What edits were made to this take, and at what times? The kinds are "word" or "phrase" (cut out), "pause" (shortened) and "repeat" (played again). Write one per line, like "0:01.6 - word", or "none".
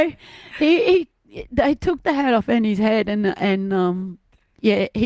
none